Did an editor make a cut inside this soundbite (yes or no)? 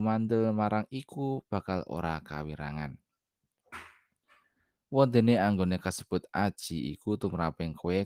no